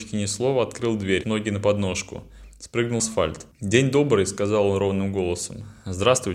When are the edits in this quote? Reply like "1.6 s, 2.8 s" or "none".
1.2 s, 3.0 s